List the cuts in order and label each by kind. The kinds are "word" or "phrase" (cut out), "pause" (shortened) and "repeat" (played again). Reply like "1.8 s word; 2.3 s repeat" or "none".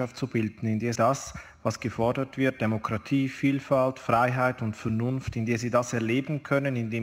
1.0 s word